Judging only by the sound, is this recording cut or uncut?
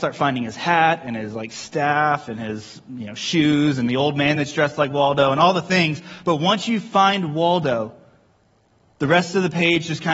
uncut